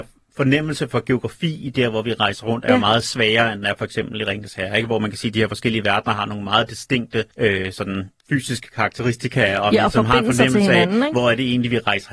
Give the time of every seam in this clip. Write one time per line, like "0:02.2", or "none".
0:07.3
0:08.2